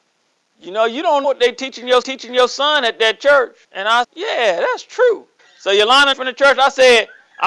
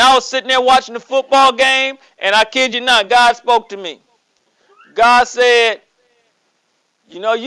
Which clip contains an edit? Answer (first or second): first